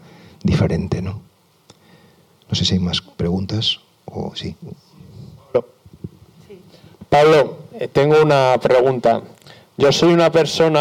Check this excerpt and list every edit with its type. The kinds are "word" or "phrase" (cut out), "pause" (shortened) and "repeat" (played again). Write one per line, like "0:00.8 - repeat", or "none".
none